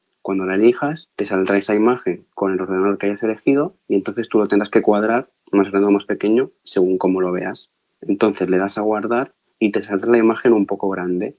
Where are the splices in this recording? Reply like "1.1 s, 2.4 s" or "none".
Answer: none